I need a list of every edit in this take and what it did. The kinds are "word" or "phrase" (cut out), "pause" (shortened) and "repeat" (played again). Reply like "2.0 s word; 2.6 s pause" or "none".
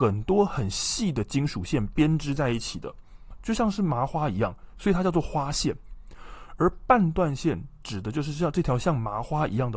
3.3 s word